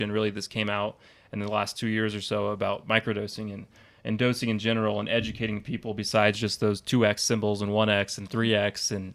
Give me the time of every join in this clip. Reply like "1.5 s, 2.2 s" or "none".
none